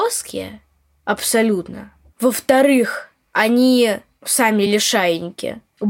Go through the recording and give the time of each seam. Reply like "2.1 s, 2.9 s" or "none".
none